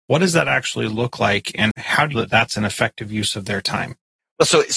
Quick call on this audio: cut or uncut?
cut